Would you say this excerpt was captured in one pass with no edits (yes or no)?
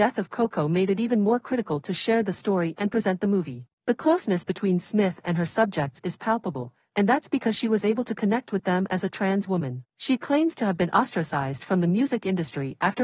no